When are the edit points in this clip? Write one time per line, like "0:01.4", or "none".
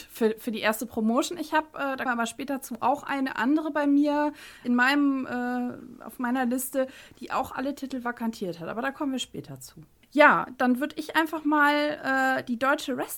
0:02.1
0:10.5